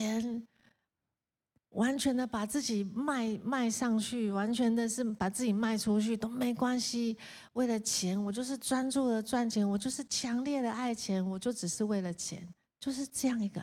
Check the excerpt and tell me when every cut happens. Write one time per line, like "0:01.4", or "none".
0:12.6